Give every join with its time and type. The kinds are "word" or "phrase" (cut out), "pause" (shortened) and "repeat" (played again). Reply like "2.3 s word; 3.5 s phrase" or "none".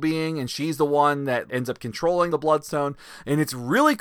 1.5 s word; 2.3 s word